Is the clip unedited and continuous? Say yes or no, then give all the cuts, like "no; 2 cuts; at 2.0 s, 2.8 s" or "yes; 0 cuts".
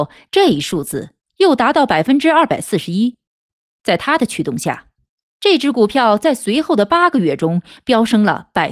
yes; 0 cuts